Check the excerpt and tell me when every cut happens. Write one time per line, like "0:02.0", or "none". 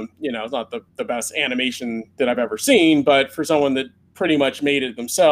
none